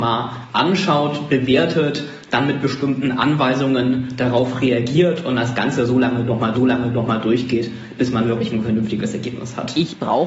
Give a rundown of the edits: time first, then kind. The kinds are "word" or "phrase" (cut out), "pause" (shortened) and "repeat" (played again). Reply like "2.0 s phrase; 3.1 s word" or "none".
6.5 s repeat

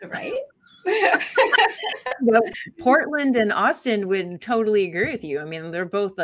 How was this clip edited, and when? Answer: none

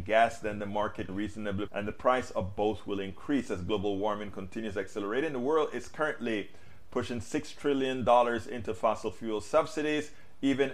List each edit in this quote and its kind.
1.1 s word; 1.7 s word

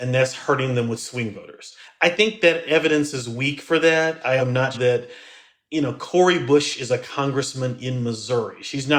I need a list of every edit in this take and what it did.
1.8 s pause; 4.4 s word; 4.7 s word

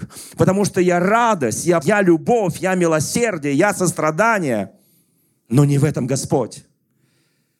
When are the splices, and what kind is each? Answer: 1.8 s word

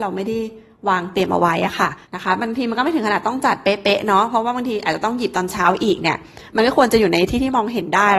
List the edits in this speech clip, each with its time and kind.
2.0 s pause

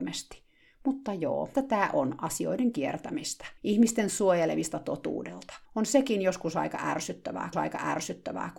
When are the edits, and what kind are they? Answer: 1.5 s word; 3.6 s pause; 5.6 s pause; 7.5 s repeat

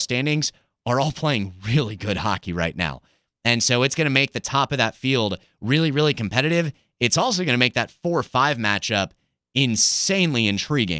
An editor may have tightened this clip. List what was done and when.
none

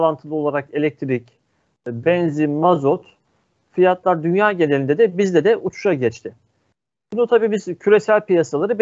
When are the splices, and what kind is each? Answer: none

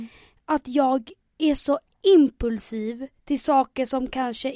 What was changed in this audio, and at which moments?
3.2 s pause

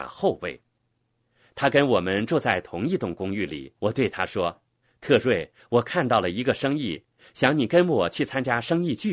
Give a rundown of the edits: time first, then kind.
3.8 s pause

